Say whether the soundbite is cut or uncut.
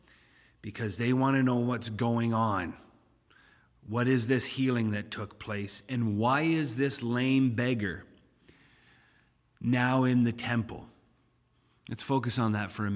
uncut